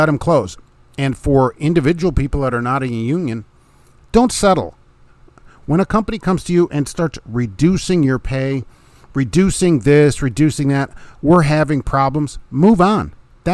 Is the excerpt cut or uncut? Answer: uncut